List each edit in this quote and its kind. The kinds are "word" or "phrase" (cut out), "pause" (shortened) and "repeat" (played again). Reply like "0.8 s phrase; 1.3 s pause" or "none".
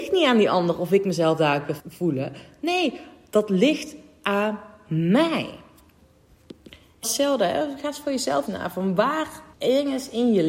1.8 s phrase; 7.0 s word; 8.5 s word; 9.5 s pause